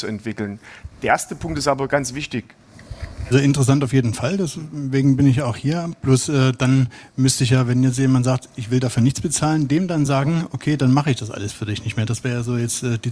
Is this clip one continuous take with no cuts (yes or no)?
yes